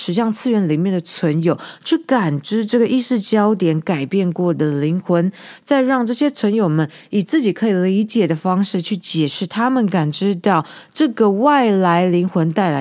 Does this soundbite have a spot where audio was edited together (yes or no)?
no